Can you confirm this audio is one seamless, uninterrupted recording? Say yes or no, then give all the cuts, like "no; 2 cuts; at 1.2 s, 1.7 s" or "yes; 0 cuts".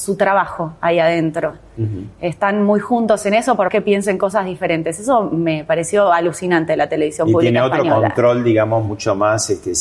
no; 1 cut; at 3.7 s